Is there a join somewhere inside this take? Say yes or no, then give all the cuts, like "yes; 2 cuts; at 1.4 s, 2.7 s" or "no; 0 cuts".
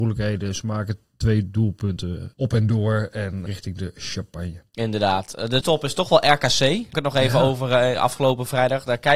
yes; 3 cuts; at 3.5 s, 5.6 s, 6.9 s